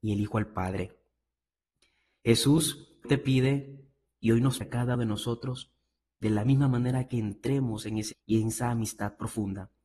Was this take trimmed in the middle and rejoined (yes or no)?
yes